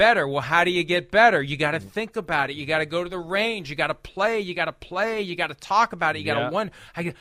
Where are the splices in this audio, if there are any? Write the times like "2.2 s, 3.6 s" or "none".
none